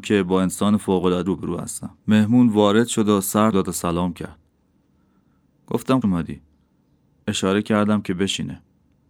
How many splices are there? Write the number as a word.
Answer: four